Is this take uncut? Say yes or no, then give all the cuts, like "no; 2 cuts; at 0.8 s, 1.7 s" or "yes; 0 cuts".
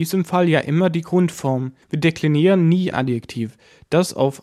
no; 2 cuts; at 1.8 s, 2.9 s